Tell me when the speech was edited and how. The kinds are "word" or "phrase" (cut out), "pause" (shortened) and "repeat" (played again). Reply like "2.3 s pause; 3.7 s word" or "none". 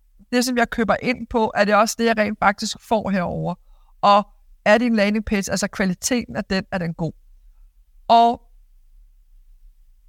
none